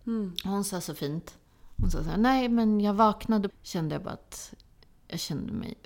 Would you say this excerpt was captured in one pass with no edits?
no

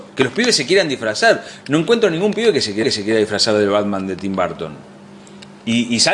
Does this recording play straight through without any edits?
no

